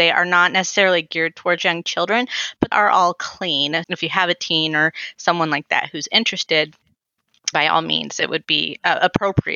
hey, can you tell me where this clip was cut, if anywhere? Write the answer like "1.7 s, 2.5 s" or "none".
2.7 s, 3.8 s, 7.5 s